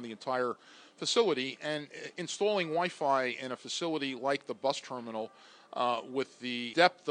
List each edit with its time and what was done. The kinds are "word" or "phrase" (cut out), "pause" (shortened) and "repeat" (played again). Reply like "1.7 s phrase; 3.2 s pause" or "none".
none